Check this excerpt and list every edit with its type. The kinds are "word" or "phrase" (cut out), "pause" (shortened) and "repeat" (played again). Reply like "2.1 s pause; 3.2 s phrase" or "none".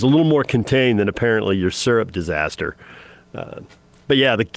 none